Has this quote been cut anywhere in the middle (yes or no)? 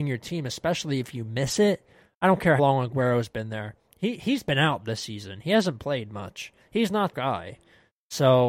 yes